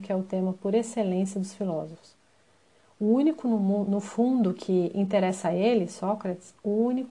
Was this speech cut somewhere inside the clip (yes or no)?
no